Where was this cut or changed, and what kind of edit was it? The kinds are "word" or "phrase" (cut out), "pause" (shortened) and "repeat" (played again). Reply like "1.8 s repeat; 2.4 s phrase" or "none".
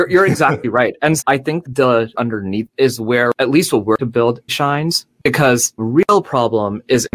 1.2 s word; 1.6 s word; 2.2 s word; 2.7 s word; 3.4 s word; 4.0 s word; 4.5 s word; 5.8 s word

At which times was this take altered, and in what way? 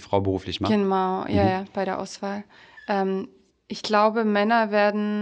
none

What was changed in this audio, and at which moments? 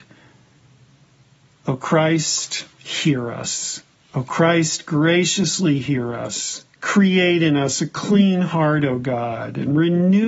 2.7 s pause; 3.9 s pause; 6.7 s pause

